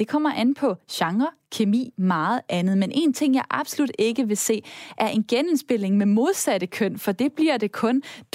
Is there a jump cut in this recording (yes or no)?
no